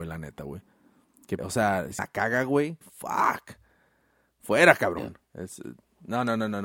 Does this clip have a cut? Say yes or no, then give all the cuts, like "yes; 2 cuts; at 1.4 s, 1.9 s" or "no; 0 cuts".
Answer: yes; 4 cuts; at 1.4 s, 2.0 s, 2.8 s, 5.2 s